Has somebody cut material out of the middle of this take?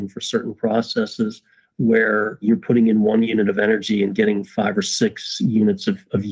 no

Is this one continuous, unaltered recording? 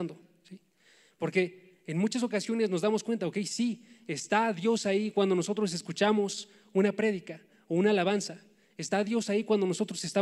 yes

